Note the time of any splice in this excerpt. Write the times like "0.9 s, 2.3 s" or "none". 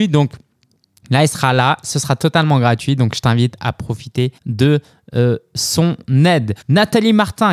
4.4 s, 6.6 s